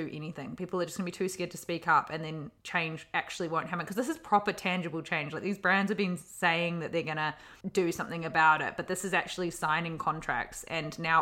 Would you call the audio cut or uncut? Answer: cut